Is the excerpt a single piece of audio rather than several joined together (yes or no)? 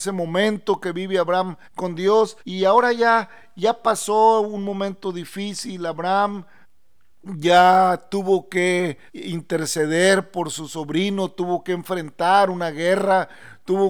no